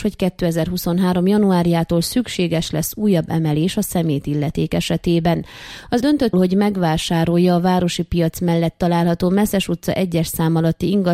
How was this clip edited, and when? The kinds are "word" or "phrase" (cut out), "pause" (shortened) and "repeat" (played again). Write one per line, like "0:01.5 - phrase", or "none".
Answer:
0:06.0 - word
0:06.3 - word